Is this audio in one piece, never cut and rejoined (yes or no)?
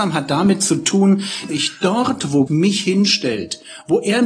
no